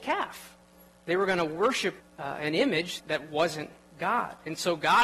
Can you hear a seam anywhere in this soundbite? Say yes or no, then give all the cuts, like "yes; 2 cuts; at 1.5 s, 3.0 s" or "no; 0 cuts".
yes; 2 cuts; at 2.0 s, 3.0 s